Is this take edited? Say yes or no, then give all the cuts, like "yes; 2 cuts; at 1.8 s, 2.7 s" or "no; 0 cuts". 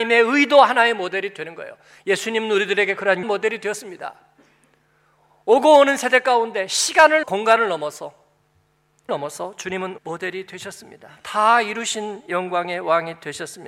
yes; 4 cuts; at 3.2 s, 7.2 s, 9.1 s, 10.0 s